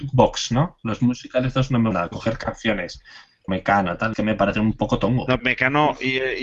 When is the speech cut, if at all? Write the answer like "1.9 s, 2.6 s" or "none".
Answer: 1.0 s, 1.9 s, 3.5 s, 4.1 s, 5.4 s

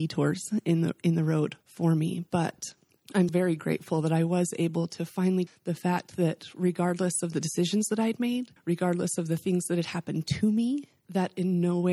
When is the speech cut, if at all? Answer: 1.6 s, 3.3 s, 5.5 s, 8.6 s

